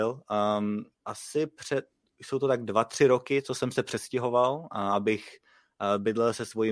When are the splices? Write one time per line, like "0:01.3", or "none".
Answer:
0:00.9